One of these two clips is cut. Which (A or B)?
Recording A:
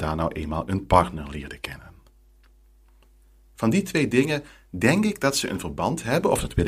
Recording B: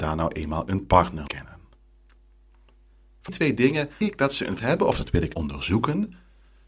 B